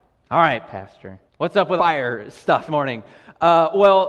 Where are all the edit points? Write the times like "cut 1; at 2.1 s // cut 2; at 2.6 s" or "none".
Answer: cut 1; at 1.3 s // cut 2; at 1.8 s // cut 3; at 2.7 s